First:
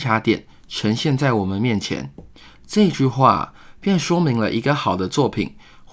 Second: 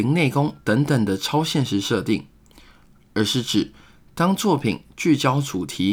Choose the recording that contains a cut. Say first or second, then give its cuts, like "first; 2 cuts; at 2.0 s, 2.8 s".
first; 1 cut; at 2.3 s